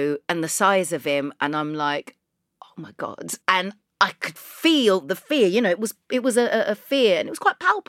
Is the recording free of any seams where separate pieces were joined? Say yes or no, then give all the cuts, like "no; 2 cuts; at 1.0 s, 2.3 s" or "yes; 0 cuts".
no; 1 cut; at 3.4 s